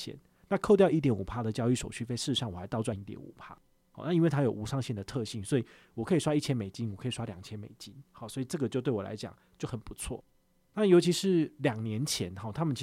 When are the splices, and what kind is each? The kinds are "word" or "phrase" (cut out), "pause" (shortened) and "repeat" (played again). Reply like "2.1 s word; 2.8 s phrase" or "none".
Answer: none